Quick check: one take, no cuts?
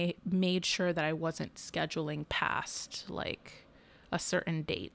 yes; 0 cuts

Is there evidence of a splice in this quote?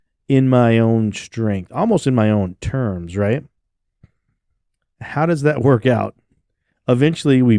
no; 0 cuts

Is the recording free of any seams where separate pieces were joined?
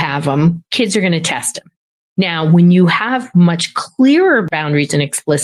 yes; 0 cuts

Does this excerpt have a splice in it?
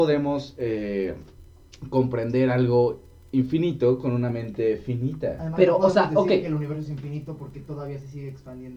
no; 0 cuts

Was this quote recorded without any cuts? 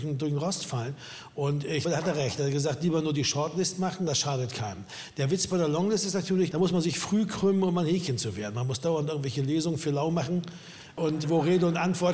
no; 2 cuts; at 1.8 s, 11.2 s

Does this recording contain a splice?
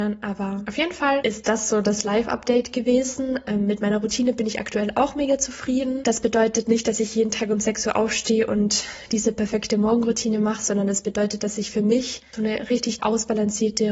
yes; 2 cuts; at 12.3 s, 13.0 s

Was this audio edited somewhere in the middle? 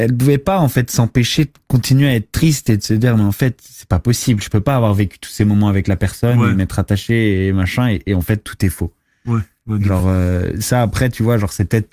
no; 0 cuts

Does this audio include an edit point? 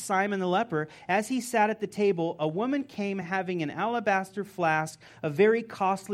no; 0 cuts

